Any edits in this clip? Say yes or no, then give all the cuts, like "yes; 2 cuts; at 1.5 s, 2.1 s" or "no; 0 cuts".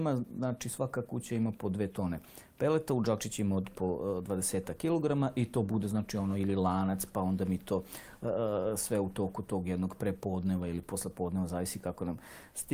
no; 0 cuts